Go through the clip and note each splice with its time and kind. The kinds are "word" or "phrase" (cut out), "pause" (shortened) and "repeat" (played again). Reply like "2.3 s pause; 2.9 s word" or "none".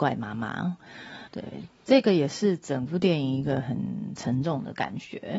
1.3 s pause